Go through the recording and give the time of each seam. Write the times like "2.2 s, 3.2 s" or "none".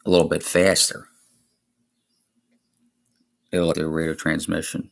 3.7 s